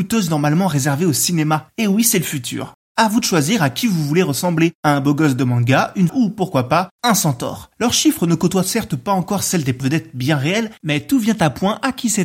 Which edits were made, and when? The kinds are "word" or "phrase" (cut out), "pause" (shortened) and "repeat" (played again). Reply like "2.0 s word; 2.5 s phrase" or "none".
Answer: 6.1 s phrase; 9.8 s word